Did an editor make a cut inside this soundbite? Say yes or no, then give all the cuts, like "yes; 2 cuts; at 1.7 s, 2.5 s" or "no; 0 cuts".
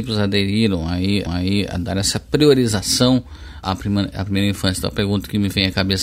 yes; 2 cuts; at 1.3 s, 3.6 s